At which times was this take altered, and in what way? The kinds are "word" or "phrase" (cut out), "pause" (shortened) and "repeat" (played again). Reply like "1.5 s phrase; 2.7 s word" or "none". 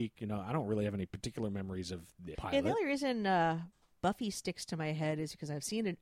2.3 s phrase